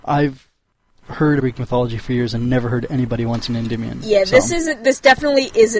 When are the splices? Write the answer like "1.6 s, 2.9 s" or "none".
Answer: 1.4 s, 3.5 s